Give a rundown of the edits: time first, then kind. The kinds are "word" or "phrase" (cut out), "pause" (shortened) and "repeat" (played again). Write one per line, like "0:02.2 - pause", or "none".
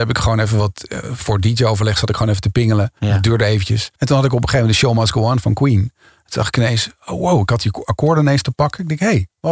0:03.0 - pause
0:04.0 - pause